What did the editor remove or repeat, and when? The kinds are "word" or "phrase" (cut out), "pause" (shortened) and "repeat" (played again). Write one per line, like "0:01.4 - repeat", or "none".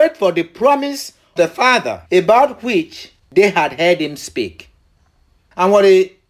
0:01.4 - word
0:02.1 - pause
0:03.2 - pause